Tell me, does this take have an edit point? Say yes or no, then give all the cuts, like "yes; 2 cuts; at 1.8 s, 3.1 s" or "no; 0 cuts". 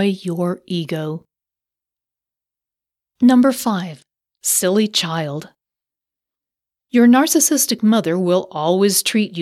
no; 0 cuts